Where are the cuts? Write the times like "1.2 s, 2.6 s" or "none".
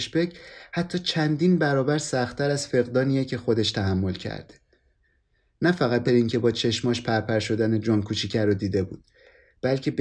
6.1 s